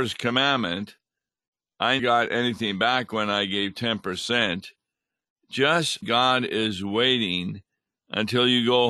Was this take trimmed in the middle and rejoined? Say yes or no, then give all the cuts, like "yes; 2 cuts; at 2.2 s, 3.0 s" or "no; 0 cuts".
yes; 2 cuts; at 2.0 s, 6.0 s